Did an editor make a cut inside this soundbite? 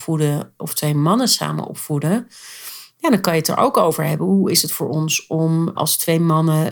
yes; 1 cut; at 5.8 s

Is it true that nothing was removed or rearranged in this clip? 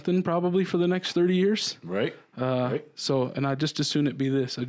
yes; 0 cuts

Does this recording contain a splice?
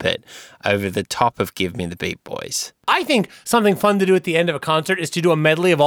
no; 0 cuts

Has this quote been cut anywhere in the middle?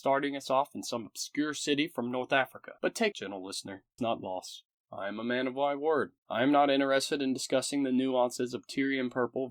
yes; 4 cuts; at 2.8 s, 3.1 s, 4.0 s, 6.2 s

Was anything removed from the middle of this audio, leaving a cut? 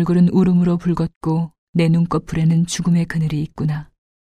no; 0 cuts

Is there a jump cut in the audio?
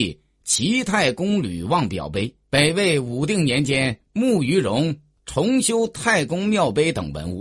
yes; 1 cut; at 2.4 s

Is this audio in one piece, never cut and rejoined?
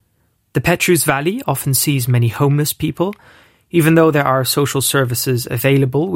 yes; 0 cuts

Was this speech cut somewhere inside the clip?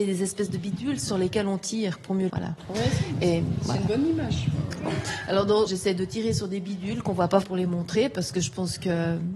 yes; 3 cuts; at 2.3 s, 5.7 s, 7.4 s

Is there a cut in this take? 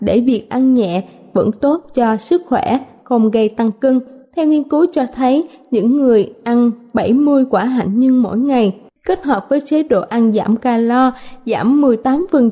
no; 0 cuts

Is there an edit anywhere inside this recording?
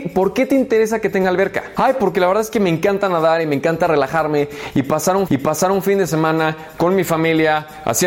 yes; 1 cut; at 5.3 s

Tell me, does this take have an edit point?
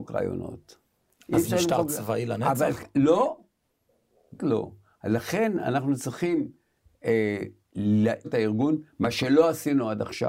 yes; 2 cuts; at 4.4 s, 8.2 s

